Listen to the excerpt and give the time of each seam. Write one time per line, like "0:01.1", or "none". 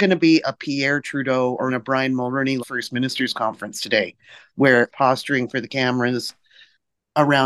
0:01.7
0:02.6
0:04.9